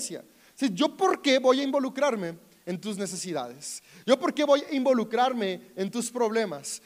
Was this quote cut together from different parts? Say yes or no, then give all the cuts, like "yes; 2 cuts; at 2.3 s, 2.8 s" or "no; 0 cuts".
no; 0 cuts